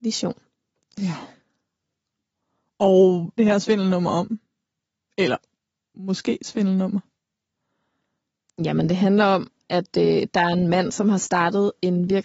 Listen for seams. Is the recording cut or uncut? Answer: cut